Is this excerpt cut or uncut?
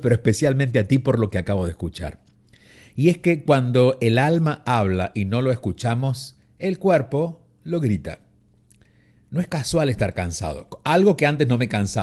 uncut